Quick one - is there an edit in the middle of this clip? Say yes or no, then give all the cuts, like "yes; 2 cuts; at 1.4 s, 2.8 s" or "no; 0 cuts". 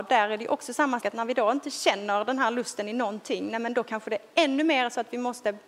yes; 1 cut; at 1.0 s